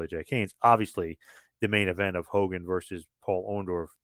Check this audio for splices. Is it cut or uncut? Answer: uncut